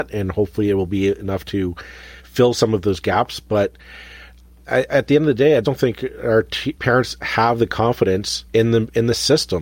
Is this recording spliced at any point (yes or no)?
yes